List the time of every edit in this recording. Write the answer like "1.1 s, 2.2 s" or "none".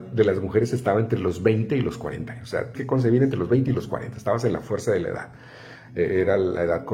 2.7 s